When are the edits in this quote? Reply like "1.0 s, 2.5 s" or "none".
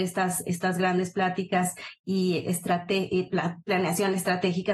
none